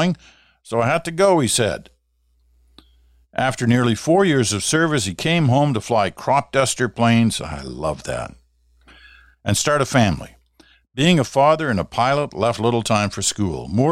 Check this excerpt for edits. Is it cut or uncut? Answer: uncut